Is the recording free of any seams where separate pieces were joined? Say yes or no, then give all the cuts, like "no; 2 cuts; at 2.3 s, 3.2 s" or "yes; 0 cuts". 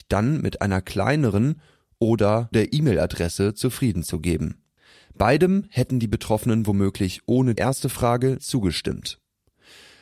no; 3 cuts; at 2.5 s, 7.6 s, 8.4 s